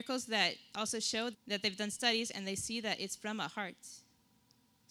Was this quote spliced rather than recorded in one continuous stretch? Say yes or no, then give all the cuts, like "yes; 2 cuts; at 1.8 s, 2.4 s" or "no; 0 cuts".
yes; 1 cut; at 1.3 s